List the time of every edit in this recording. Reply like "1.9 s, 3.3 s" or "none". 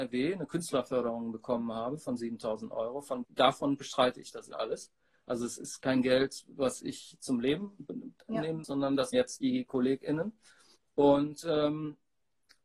3.2 s, 4.5 s, 8.6 s, 9.1 s, 10.8 s